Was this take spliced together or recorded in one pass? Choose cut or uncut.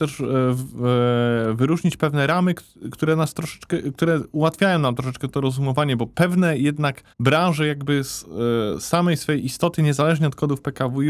cut